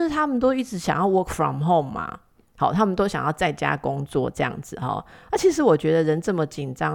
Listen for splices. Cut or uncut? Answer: uncut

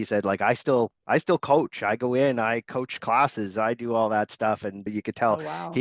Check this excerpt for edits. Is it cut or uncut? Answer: cut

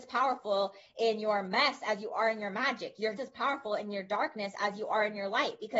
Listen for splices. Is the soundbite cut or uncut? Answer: cut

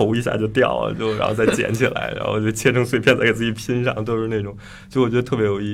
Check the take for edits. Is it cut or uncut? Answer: uncut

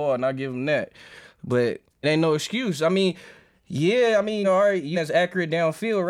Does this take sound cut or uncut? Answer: cut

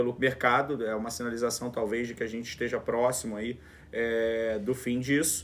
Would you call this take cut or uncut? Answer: uncut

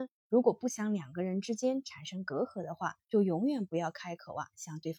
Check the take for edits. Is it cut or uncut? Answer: cut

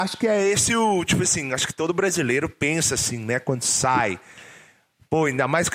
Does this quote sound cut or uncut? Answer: uncut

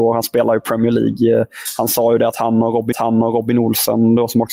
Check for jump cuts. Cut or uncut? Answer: cut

